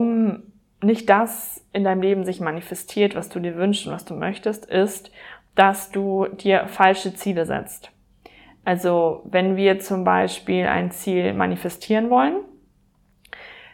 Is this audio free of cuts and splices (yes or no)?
yes